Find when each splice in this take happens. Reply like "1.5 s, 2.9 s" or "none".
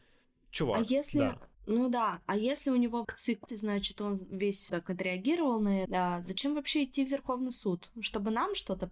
1.5 s, 3.0 s, 3.5 s, 4.7 s, 5.9 s